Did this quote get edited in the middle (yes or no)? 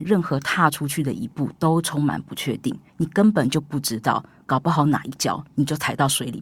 yes